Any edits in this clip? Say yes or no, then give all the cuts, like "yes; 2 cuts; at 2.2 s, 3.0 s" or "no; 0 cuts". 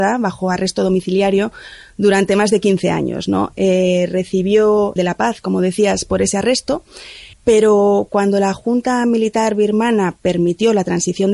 yes; 2 cuts; at 5.0 s, 7.3 s